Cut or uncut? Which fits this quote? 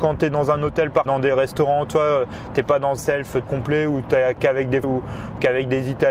cut